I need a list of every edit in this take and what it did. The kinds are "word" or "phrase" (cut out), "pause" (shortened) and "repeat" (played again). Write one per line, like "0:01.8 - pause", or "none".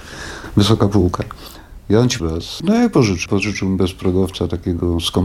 0:02.2 - word
0:03.3 - word